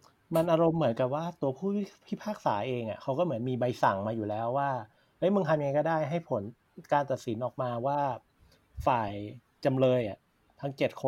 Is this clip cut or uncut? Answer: uncut